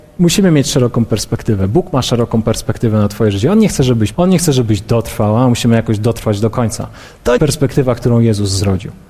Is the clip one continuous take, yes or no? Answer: no